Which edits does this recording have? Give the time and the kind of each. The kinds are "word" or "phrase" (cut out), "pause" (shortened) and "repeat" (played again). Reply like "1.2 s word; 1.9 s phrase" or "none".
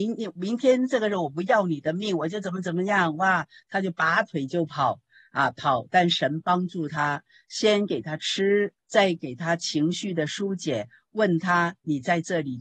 8.8 s pause